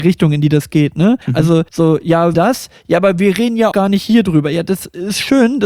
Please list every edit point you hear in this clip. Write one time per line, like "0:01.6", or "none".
0:01.2
0:01.7
0:02.3
0:03.7